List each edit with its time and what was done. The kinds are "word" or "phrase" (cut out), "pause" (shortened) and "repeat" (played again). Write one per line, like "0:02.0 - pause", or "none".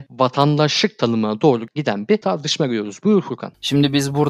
none